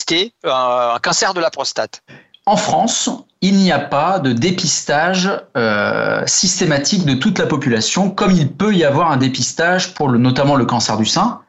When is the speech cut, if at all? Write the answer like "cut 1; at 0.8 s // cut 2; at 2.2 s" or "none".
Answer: none